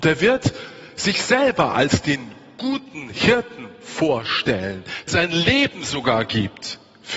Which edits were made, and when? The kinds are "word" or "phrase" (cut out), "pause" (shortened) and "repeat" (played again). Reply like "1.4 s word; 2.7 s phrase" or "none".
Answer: 5.1 s word